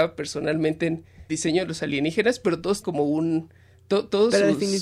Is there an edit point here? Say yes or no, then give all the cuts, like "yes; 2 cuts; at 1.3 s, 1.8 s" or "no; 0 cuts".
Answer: yes; 2 cuts; at 1.3 s, 2.8 s